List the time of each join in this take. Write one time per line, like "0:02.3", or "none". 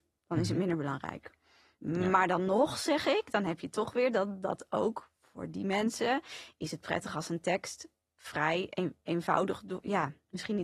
none